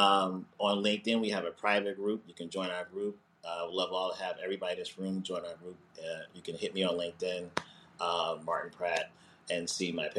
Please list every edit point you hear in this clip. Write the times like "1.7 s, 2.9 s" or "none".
none